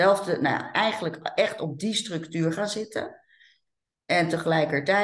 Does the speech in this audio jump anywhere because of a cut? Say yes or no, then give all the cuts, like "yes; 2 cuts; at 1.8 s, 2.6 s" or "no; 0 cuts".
no; 0 cuts